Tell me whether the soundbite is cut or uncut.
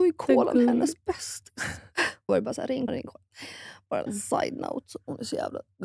cut